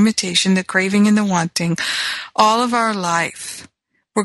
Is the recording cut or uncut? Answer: uncut